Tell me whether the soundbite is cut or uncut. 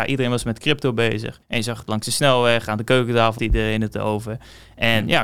cut